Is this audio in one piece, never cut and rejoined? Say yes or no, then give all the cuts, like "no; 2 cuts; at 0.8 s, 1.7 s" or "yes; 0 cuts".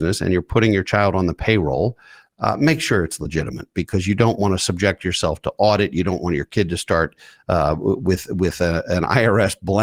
yes; 0 cuts